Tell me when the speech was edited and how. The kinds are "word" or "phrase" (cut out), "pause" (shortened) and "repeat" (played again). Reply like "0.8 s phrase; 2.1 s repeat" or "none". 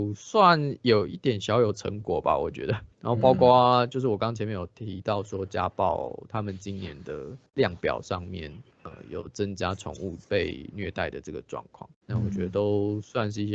2.9 s pause; 7.5 s pause; 8.7 s pause; 10.2 s pause; 11.9 s pause